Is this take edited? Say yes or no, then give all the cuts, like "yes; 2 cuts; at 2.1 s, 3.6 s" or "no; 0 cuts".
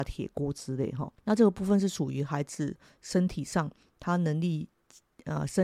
yes; 1 cut; at 1.1 s